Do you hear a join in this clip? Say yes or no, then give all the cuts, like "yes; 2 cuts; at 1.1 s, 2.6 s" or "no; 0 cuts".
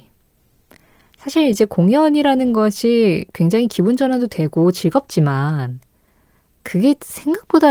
no; 0 cuts